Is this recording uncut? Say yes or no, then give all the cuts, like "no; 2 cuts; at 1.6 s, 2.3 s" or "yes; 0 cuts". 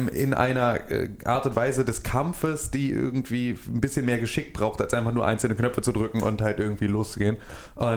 yes; 0 cuts